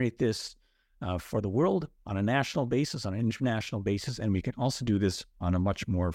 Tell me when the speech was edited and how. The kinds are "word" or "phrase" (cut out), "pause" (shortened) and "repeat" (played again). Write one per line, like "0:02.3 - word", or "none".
none